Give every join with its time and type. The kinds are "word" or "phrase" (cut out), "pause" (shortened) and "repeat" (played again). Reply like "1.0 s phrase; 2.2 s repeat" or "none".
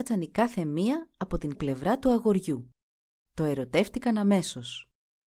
1.5 s word; 3.0 s pause